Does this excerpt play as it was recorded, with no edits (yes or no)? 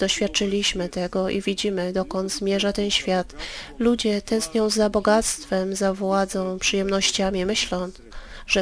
yes